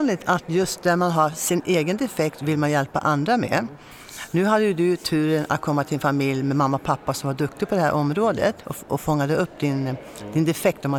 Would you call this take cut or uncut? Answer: uncut